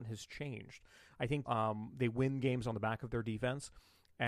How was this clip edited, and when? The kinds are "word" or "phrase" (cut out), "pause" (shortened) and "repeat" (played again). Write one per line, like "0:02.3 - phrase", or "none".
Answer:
0:01.5 - word